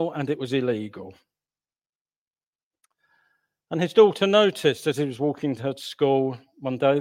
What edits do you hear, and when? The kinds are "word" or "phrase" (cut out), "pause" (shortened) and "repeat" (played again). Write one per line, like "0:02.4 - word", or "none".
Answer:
none